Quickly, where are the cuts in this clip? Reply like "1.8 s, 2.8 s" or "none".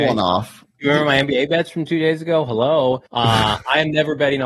3.1 s